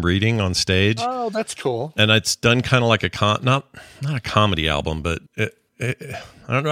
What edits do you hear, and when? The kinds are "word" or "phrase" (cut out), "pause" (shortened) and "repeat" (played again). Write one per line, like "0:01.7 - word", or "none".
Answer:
0:05.3 - pause